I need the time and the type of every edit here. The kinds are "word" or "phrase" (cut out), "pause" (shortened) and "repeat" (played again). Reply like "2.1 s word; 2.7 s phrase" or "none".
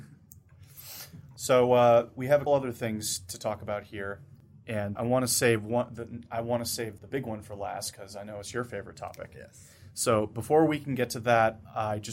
1.4 s word; 2.5 s word; 5.0 s word; 7.0 s word